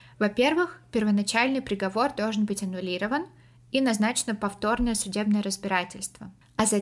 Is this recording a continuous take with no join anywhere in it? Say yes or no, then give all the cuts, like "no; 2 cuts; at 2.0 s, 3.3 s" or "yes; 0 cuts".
yes; 0 cuts